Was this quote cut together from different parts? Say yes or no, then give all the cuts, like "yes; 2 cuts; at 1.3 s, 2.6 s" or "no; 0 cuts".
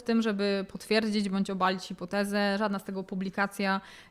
no; 0 cuts